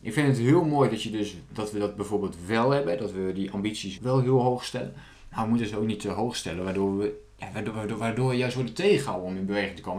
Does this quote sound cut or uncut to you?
cut